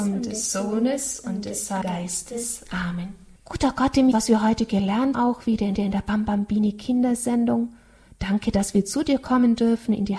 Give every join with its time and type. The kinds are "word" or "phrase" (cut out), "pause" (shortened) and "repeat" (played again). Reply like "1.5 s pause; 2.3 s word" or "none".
1.8 s word; 3.4 s pause; 4.1 s phrase; 5.1 s word; 5.8 s repeat